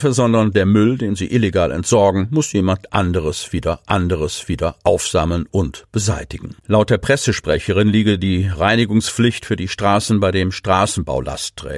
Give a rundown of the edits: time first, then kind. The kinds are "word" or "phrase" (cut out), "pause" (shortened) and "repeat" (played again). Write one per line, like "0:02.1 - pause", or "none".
0:03.9 - repeat
0:06.6 - pause